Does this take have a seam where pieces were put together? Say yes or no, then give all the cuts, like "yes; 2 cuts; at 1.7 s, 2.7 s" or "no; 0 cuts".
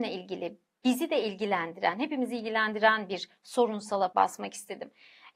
yes; 1 cut; at 4.1 s